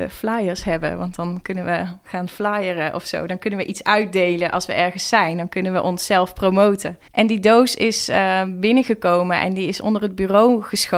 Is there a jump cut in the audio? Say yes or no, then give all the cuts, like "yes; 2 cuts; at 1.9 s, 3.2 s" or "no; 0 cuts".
yes; 1 cut; at 7.1 s